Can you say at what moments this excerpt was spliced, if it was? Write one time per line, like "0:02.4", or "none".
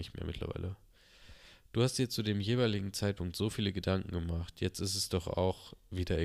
none